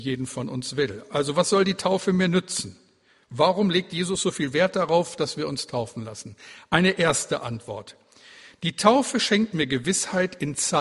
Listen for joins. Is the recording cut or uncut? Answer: uncut